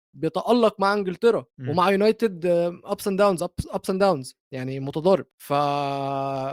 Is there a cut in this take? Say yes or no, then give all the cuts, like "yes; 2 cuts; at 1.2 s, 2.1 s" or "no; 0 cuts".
yes; 3 cuts; at 1.5 s, 4.4 s, 5.3 s